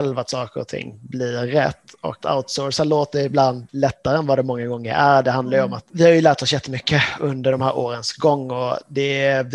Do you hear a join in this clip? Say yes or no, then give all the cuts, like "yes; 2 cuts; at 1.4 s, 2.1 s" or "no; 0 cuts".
yes; 1 cut; at 2.2 s